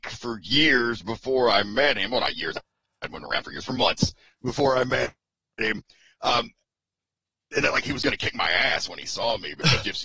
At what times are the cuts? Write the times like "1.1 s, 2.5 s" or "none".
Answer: none